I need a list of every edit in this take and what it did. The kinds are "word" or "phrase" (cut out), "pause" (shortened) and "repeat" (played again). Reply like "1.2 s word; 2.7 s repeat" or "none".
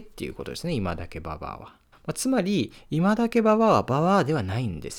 1.9 s pause